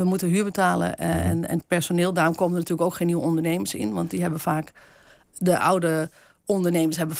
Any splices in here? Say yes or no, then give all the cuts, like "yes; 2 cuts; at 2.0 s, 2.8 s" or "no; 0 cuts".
no; 0 cuts